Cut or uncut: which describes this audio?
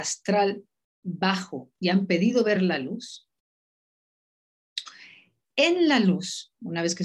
uncut